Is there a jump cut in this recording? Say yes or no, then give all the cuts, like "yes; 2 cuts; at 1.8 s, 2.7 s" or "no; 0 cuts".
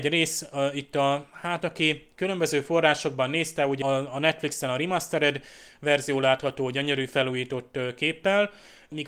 yes; 1 cut; at 3.8 s